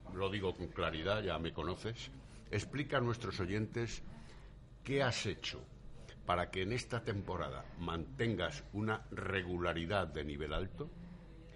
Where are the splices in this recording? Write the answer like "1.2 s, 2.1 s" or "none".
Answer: none